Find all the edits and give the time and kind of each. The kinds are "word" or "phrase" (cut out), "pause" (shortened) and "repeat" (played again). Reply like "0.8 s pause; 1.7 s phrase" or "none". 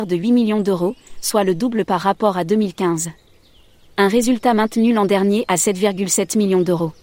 none